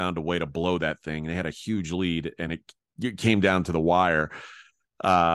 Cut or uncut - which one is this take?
uncut